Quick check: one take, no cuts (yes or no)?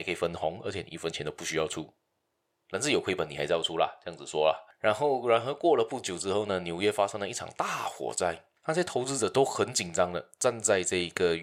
yes